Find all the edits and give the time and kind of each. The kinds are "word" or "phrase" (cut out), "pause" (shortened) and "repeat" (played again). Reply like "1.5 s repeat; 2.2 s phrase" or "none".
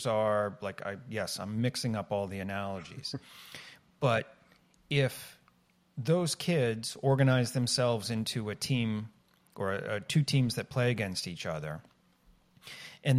none